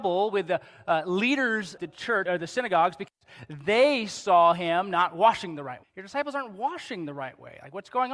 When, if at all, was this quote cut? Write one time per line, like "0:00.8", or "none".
0:01.8
0:02.3
0:05.8